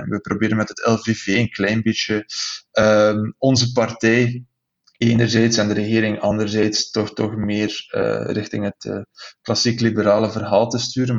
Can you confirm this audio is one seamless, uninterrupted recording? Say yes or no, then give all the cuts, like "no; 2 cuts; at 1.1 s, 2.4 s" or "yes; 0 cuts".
yes; 0 cuts